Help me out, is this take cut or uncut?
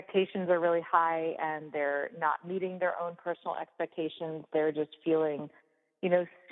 uncut